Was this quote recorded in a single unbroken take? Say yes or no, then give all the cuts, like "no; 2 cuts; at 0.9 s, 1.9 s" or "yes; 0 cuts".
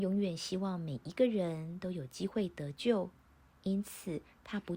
yes; 0 cuts